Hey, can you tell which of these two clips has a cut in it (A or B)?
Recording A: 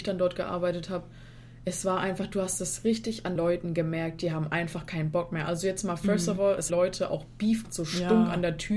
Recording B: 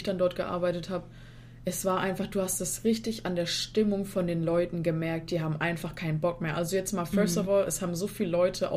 A